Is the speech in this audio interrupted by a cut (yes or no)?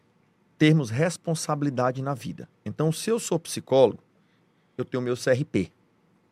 no